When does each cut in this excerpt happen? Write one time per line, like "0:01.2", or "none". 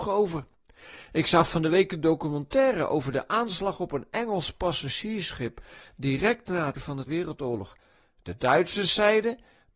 0:06.7
0:07.1